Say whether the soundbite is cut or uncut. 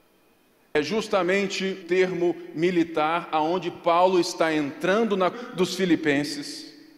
cut